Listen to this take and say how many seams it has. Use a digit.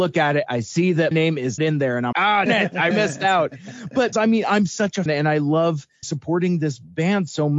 8